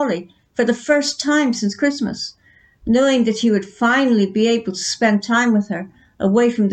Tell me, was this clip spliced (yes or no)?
no